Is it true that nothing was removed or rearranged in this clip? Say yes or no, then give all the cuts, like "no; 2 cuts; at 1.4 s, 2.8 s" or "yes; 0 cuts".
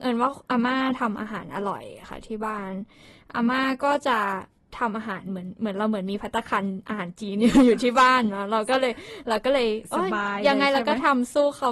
yes; 0 cuts